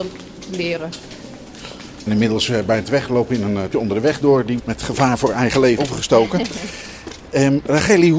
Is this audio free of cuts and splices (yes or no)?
no